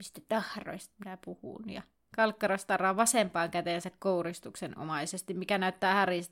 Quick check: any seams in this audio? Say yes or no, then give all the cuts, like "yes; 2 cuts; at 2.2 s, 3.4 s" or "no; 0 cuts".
no; 0 cuts